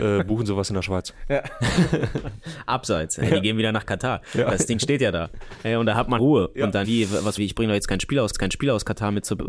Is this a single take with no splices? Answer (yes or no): no